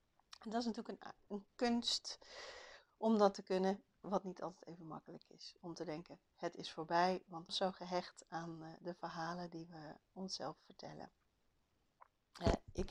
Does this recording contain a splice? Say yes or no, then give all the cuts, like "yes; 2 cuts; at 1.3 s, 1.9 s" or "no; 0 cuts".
yes; 2 cuts; at 4.0 s, 7.5 s